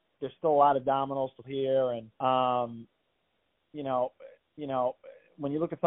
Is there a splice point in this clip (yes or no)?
yes